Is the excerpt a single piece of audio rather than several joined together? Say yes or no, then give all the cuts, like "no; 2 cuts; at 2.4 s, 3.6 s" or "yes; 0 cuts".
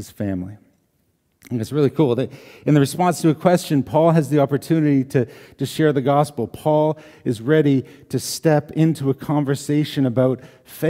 yes; 0 cuts